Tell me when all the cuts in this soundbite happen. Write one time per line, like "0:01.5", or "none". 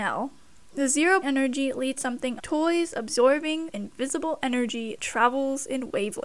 0:01.2
0:02.0
0:02.4
0:03.7
0:05.0

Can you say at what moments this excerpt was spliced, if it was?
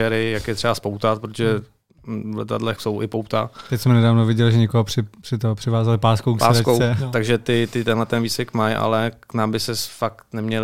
0:02.8
0:05.2

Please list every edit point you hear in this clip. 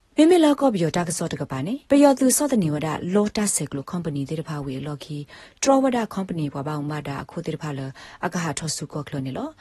0:01.8

